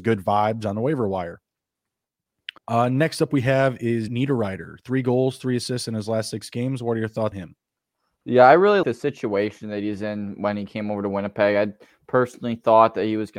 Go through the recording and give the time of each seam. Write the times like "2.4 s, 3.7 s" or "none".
2.6 s, 4.1 s, 7.3 s, 8.8 s